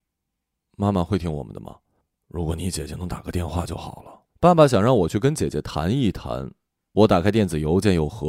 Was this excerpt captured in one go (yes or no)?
no